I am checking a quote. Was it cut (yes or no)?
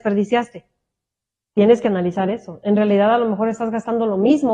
no